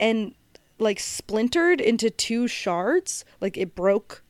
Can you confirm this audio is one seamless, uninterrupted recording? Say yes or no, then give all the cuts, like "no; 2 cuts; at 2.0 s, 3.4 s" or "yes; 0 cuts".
yes; 0 cuts